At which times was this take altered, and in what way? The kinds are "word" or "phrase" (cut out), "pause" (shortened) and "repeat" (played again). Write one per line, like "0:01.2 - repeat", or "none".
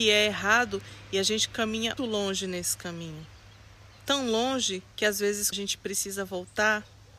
0:02.0 - word
0:04.9 - pause
0:05.5 - phrase